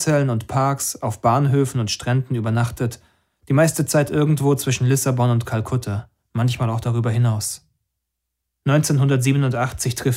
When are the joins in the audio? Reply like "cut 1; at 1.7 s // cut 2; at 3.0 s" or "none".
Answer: none